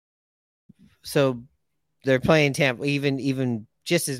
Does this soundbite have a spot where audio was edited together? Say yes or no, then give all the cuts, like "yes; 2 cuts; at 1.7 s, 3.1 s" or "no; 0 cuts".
no; 0 cuts